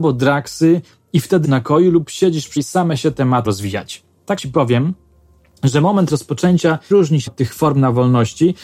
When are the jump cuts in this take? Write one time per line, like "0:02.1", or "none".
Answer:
0:01.4
0:02.6
0:03.5
0:04.4
0:06.9
0:07.3